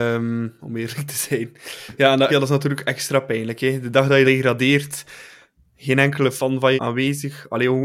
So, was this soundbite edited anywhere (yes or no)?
yes